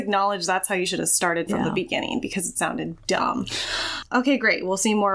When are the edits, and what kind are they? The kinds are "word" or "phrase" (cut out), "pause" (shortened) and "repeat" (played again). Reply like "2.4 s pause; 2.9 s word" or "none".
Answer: 1.5 s word